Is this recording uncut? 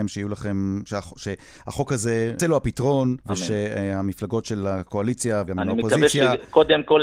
no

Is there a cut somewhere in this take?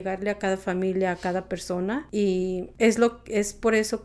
no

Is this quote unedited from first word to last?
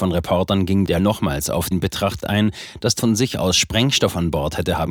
no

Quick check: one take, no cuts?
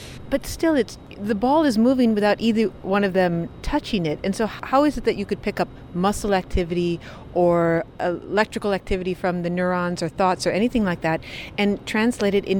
yes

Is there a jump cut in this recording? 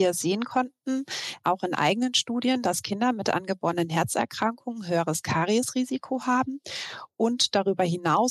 no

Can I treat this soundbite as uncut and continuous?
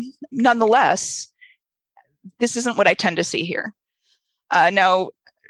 yes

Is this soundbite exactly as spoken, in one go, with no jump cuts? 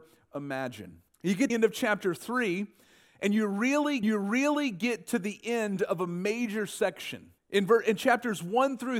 no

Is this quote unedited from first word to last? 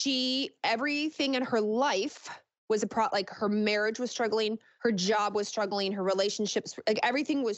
yes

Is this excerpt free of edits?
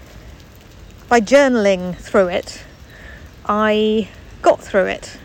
yes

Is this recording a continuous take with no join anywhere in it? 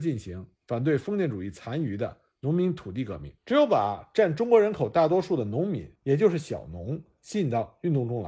no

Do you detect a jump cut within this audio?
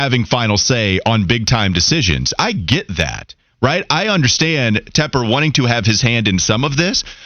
no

